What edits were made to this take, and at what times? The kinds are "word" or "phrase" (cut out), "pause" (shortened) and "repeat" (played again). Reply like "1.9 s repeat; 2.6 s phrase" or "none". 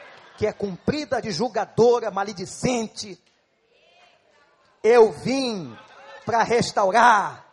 1.2 s word